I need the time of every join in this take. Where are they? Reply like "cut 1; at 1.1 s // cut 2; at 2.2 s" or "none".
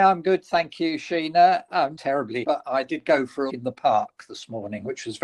cut 1; at 2.0 s // cut 2; at 2.4 s // cut 3; at 3.5 s